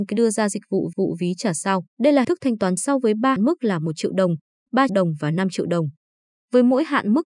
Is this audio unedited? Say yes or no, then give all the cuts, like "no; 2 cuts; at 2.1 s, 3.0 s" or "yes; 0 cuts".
no; 6 cuts; at 0.9 s, 1.9 s, 2.2 s, 2.8 s, 3.4 s, 4.9 s